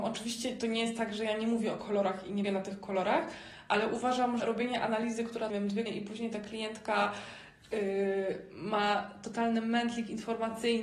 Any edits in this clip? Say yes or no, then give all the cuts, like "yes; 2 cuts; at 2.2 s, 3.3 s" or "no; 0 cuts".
yes; 4 cuts; at 2.4 s, 4.4 s, 5.5 s, 5.9 s